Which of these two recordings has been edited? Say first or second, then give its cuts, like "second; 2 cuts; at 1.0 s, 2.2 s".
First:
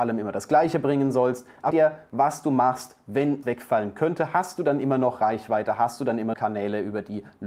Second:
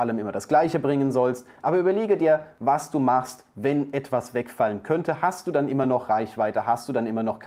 first; 3 cuts; at 1.7 s, 3.4 s, 6.3 s